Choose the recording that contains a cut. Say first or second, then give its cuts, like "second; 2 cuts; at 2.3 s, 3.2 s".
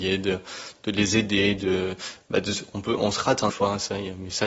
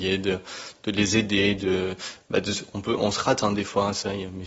first; 1 cut; at 3.5 s